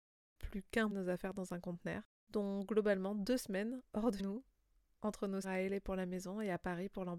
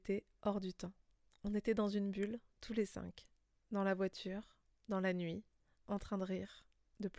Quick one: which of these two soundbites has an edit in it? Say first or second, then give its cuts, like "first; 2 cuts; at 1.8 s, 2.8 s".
first; 5 cuts; at 0.9 s, 2.2 s, 3.9 s, 4.2 s, 5.4 s